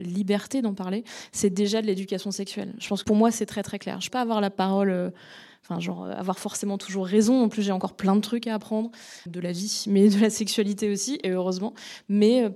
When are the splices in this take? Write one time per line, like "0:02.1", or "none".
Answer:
0:03.0
0:04.1
0:09.3